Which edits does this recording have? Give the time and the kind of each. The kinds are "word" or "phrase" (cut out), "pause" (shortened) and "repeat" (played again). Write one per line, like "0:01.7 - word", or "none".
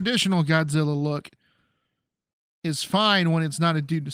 none